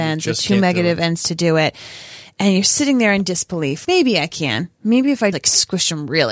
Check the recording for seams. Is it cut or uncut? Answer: cut